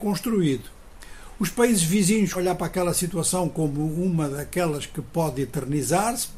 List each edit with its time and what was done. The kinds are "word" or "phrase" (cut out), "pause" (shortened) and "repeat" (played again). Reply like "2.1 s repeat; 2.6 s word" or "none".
2.3 s word